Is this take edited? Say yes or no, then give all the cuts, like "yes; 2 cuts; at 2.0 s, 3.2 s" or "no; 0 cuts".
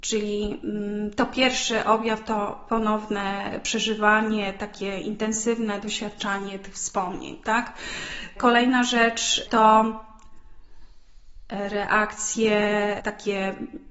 no; 0 cuts